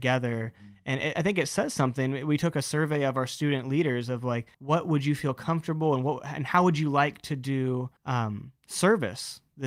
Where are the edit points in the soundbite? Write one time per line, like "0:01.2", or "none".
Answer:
0:01.1
0:04.5
0:08.0